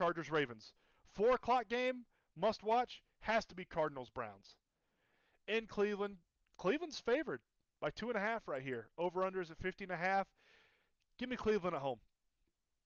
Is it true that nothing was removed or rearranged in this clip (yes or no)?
yes